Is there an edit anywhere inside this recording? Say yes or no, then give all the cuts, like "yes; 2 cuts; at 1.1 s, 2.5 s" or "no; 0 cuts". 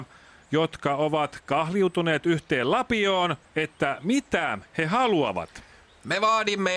yes; 1 cut; at 3.4 s